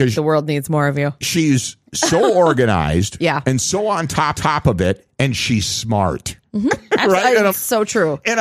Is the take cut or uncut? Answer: cut